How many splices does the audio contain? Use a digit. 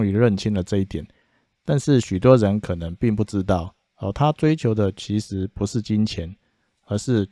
0